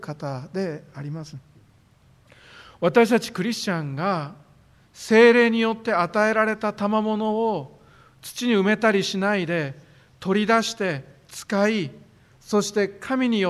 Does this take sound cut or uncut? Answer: uncut